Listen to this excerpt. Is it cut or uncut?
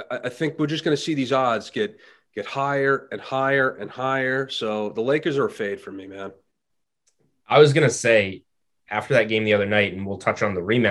uncut